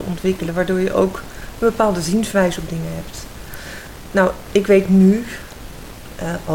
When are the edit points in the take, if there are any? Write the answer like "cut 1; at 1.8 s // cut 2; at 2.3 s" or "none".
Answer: none

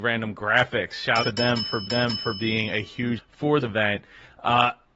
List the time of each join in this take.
cut 1; at 1.2 s // cut 2; at 1.9 s // cut 3; at 3.2 s // cut 4; at 3.6 s

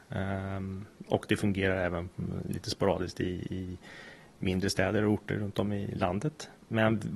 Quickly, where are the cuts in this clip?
none

